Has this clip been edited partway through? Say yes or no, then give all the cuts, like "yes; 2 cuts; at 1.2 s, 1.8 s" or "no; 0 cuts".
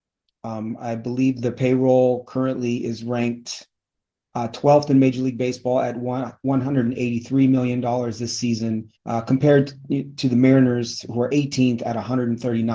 yes; 1 cut; at 9.0 s